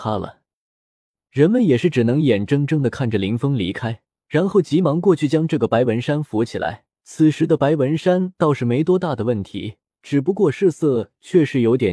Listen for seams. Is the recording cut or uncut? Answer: cut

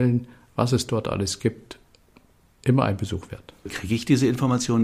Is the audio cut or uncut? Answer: uncut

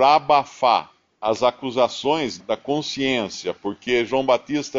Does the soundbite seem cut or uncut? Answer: cut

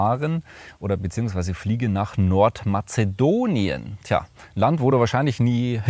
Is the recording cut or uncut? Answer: uncut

